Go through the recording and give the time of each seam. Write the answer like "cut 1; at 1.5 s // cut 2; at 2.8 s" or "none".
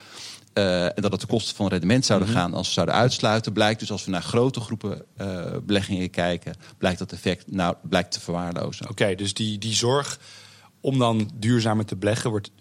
none